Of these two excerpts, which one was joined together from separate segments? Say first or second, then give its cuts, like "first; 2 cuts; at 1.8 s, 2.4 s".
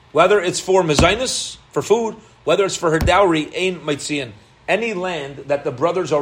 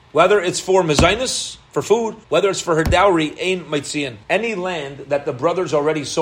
second; 2 cuts; at 2.2 s, 4.2 s